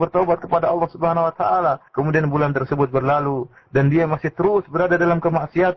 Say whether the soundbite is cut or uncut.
cut